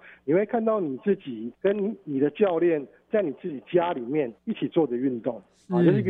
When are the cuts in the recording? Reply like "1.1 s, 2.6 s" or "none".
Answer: 1.5 s, 4.4 s